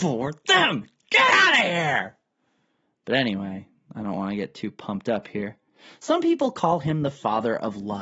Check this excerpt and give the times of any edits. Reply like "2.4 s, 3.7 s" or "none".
none